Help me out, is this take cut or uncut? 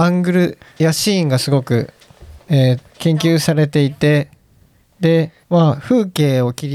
cut